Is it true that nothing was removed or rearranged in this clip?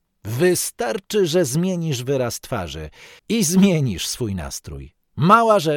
no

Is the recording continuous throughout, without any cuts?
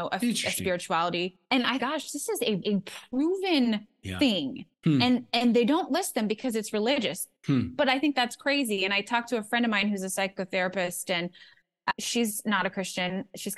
no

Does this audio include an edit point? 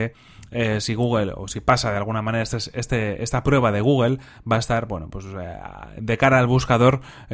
no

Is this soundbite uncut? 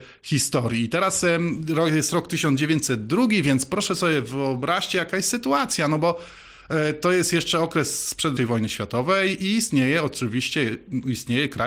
no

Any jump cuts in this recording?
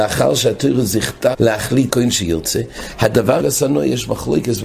yes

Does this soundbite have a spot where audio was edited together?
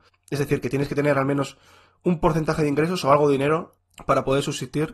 no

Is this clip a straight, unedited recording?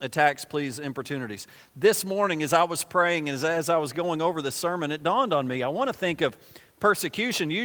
yes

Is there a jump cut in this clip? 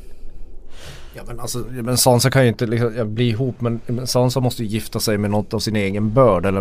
no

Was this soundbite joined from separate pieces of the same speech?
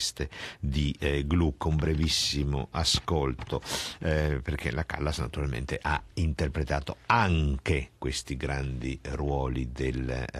no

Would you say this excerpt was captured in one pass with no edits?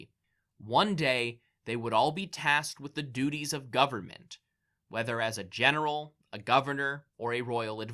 yes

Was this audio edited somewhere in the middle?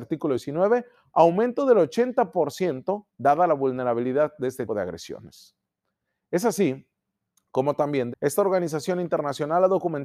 yes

